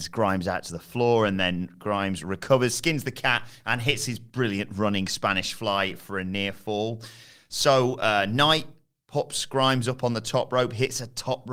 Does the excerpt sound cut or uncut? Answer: uncut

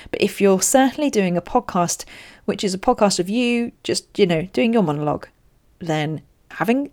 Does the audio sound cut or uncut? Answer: uncut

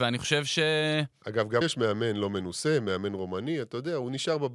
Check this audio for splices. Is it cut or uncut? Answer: cut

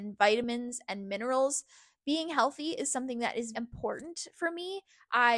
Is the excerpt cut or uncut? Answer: cut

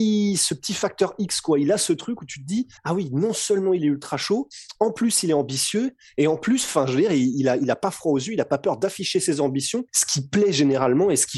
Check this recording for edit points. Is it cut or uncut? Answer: cut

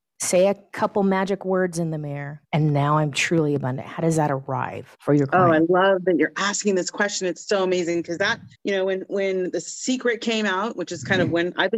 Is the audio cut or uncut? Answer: cut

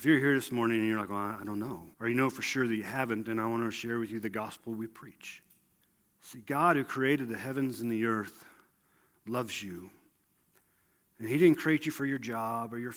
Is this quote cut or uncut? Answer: cut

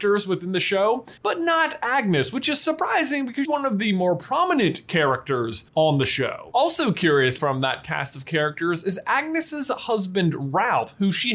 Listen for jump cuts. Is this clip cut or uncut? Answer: cut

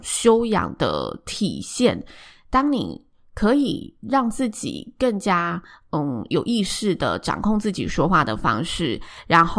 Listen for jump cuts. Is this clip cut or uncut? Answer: uncut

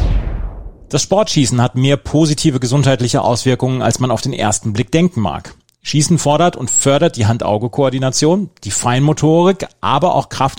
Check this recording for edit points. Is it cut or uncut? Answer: uncut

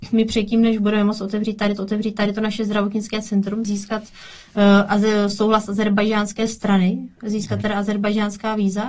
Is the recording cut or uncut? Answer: cut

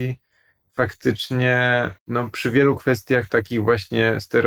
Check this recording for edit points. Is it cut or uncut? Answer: cut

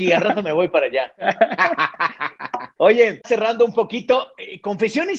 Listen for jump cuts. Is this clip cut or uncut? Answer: cut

